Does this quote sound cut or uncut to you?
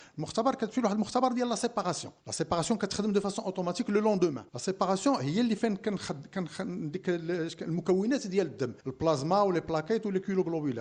cut